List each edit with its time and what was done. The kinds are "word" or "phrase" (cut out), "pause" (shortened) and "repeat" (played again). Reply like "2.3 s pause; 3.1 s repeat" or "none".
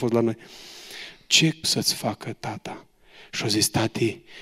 1.6 s word